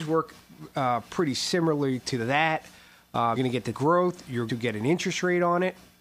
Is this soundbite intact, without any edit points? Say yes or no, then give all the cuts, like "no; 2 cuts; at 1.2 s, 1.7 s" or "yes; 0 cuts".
no; 3 cuts; at 3.4 s, 3.7 s, 4.5 s